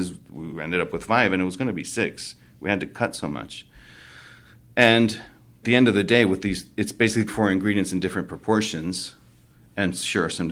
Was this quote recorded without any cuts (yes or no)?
no